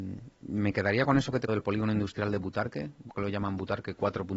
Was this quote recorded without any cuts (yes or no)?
no